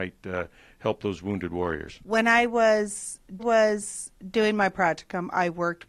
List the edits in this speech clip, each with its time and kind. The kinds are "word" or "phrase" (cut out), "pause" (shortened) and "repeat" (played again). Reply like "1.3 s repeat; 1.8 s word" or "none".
3.4 s repeat